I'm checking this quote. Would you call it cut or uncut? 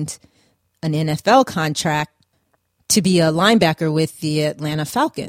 uncut